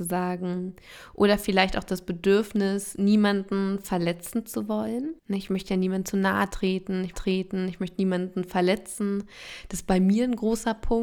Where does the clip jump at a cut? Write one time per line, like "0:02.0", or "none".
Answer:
0:05.2
0:07.1